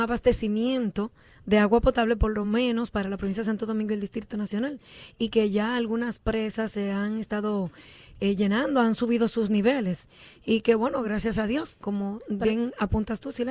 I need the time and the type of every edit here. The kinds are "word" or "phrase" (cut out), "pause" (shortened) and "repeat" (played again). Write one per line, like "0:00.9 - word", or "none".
none